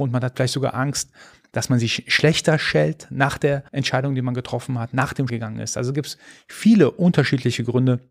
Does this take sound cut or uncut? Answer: cut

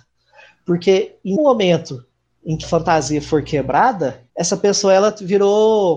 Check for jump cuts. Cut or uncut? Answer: cut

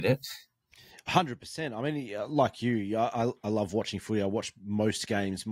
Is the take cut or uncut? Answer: uncut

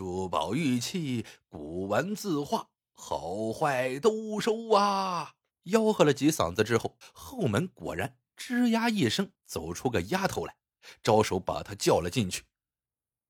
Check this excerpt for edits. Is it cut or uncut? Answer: cut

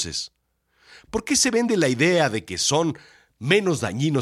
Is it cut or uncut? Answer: uncut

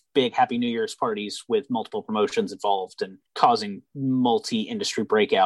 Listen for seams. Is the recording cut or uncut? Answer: cut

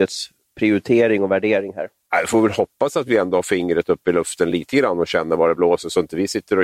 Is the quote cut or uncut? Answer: uncut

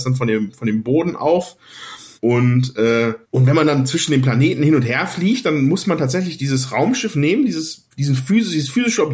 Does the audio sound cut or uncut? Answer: cut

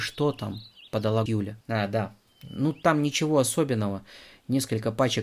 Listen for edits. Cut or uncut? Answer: cut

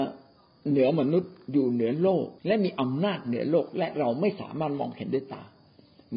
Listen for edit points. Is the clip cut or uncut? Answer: cut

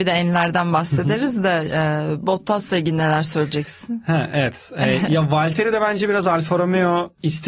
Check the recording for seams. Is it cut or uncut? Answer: cut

